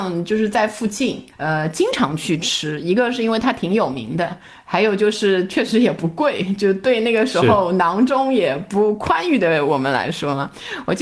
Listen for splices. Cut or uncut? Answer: cut